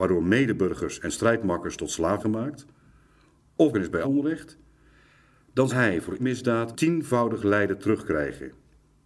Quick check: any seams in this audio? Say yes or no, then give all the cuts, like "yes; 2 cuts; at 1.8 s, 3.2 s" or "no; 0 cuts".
yes; 6 cuts; at 2.2 s, 3.7 s, 4.0 s, 5.7 s, 6.2 s, 6.7 s